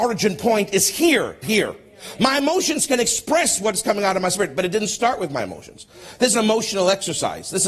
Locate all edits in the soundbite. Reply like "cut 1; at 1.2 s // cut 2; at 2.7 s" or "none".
cut 1; at 1.4 s // cut 2; at 6.3 s